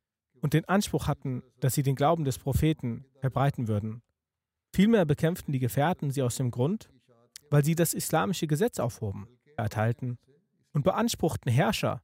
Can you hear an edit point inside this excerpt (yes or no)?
yes